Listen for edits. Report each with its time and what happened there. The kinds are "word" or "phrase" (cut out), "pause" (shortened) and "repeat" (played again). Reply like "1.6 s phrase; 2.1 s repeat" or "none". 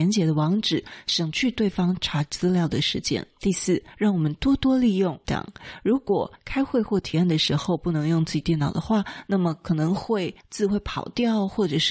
5.2 s word